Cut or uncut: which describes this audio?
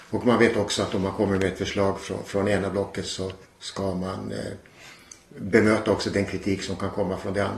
cut